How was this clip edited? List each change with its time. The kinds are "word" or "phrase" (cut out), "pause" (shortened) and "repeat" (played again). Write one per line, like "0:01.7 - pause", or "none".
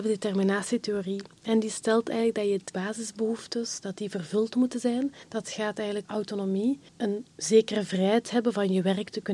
0:02.7 - word
0:05.2 - pause
0:06.0 - word
0:06.9 - pause